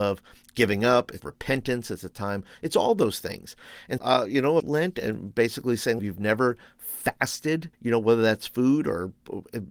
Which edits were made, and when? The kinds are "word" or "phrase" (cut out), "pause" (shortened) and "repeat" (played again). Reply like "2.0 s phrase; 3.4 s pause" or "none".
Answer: 1.2 s phrase; 4.0 s word; 4.6 s phrase; 6.0 s phrase; 7.7 s pause